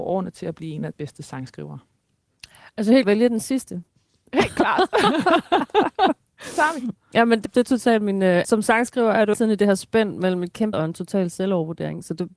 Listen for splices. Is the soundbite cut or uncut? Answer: cut